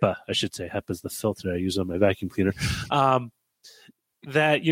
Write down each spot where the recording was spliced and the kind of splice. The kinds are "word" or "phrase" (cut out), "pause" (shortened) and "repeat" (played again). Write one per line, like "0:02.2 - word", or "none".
none